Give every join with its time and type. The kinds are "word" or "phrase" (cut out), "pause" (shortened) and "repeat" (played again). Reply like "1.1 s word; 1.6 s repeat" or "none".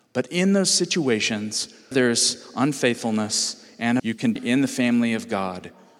1.9 s word; 4.0 s word; 4.4 s word

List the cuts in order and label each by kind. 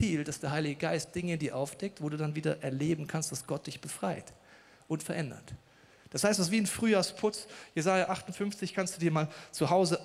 none

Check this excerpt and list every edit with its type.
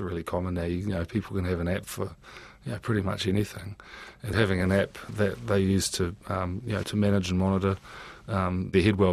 4.3 s word; 5.1 s word; 6.8 s word

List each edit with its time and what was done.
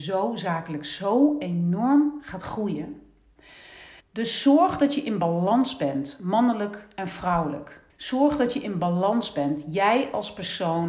4.0 s pause; 7.9 s pause

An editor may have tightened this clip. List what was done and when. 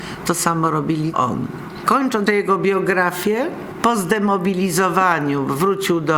1.1 s word; 2.3 s word

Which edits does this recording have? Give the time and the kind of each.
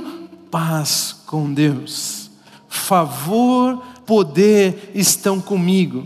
4.0 s word

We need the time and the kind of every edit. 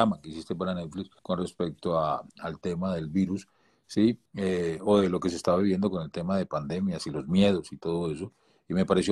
1.2 s pause; 2.3 s pause; 4.3 s pause

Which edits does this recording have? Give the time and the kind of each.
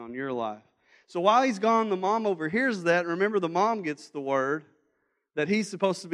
none

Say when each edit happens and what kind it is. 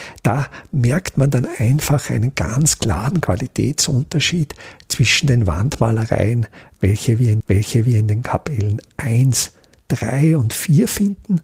7.4 s repeat

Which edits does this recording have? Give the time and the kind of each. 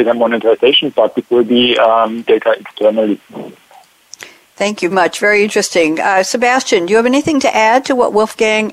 1.2 s word; 2.3 s word; 4.9 s word

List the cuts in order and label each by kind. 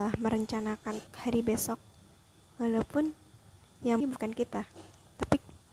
1.1 s word; 4.0 s word

